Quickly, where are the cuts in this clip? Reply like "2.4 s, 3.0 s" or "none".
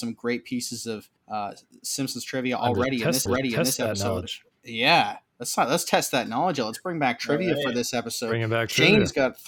1.2 s, 3.3 s